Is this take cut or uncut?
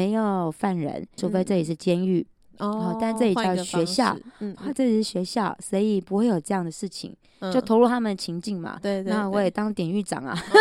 cut